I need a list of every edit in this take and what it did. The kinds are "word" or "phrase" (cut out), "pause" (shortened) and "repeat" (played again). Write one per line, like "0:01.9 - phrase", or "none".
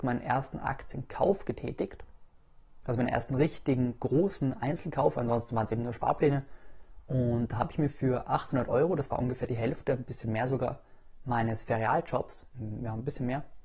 none